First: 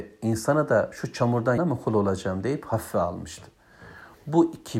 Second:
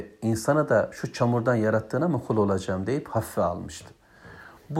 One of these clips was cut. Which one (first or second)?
first